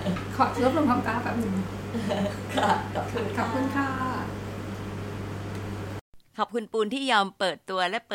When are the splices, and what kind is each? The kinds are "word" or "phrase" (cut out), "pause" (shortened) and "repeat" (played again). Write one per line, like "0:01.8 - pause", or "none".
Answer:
0:06.3 - pause